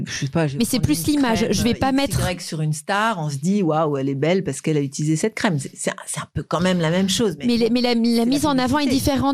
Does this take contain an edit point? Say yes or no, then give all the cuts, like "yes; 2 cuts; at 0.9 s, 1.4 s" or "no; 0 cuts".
no; 0 cuts